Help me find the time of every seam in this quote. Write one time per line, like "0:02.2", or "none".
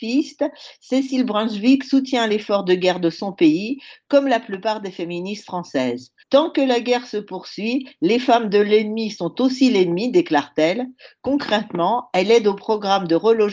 0:06.2